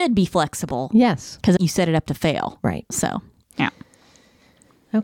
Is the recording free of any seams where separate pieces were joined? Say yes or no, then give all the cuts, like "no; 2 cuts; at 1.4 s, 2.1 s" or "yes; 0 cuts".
no; 1 cut; at 1.6 s